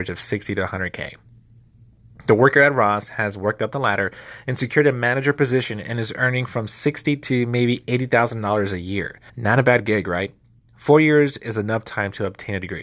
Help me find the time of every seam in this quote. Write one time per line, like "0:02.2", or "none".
0:09.3